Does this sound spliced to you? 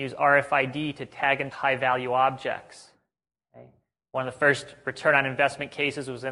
yes; 1 cut; at 1.5 s

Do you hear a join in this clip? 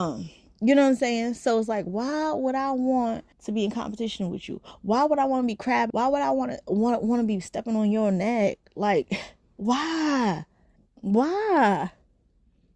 yes; 3 cuts; at 3.3 s, 5.9 s, 10.8 s

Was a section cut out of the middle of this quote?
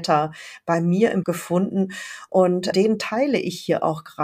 yes; 2 cuts; at 1.2 s, 2.7 s

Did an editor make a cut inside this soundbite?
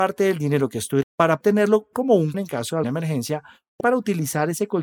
yes; 6 cuts; at 1.0 s, 1.4 s, 1.9 s, 2.3 s, 2.8 s, 3.8 s

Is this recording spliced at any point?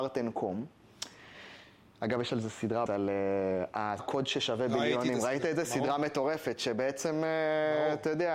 yes; 2 cuts; at 2.9 s, 4.0 s

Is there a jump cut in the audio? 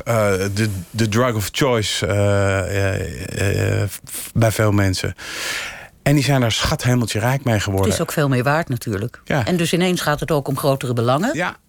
no; 0 cuts

